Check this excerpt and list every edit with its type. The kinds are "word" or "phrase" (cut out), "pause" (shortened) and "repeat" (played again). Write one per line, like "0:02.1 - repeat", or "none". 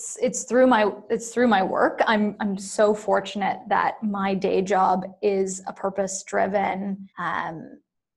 0:07.1 - pause